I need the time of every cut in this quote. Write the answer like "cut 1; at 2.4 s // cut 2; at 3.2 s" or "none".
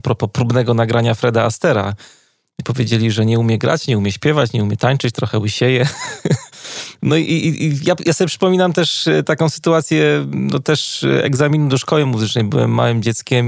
none